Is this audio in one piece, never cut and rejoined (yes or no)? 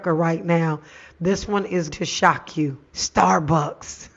no